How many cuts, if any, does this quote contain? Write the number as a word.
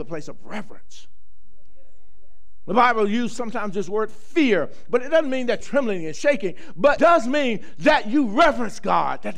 two